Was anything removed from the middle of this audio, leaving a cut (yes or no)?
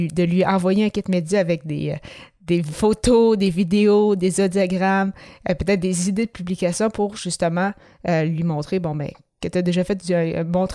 no